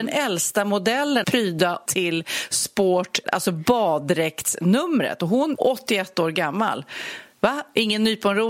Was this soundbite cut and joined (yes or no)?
yes